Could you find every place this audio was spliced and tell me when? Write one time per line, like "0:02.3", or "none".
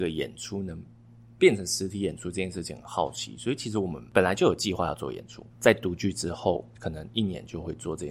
0:05.5
0:06.7